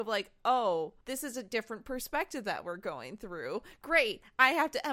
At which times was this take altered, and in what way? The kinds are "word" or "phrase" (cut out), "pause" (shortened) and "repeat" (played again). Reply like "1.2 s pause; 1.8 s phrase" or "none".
1.0 s pause